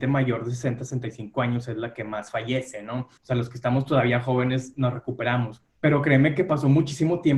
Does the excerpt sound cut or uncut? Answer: cut